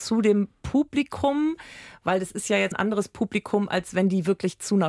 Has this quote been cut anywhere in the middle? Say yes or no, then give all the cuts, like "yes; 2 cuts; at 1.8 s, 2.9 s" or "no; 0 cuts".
yes; 1 cut; at 2.7 s